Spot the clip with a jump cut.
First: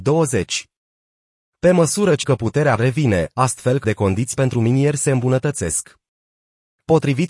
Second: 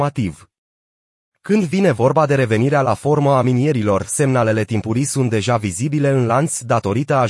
first; 4 cuts; at 2.2 s, 2.8 s, 3.8 s, 4.3 s

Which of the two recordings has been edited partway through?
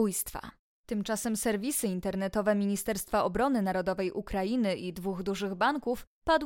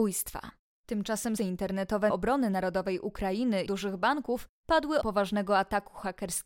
second; 4 cuts; at 1.4 s, 2.1 s, 3.7 s, 5.0 s

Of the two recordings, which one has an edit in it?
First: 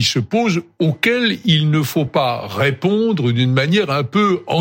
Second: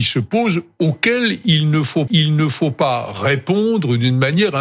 second; 1 cut; at 2.1 s

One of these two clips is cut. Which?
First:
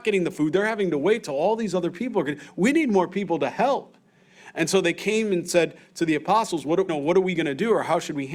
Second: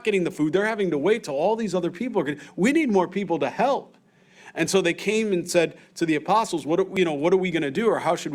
first; 1 cut; at 6.9 s

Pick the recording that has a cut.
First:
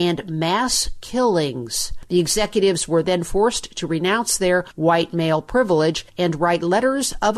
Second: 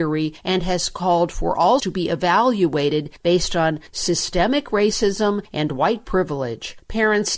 second; 1 cut; at 1.8 s

